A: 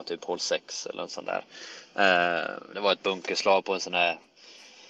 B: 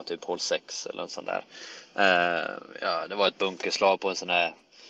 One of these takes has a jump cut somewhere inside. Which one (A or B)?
A